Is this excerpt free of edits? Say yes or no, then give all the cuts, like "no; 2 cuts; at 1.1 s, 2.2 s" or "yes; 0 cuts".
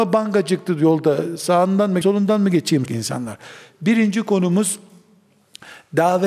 no; 2 cuts; at 2.0 s, 2.8 s